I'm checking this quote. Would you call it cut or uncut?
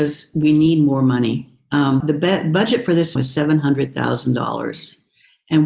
cut